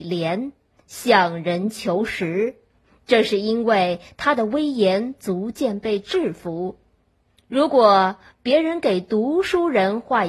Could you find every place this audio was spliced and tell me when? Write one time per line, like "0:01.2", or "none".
0:02.8
0:07.4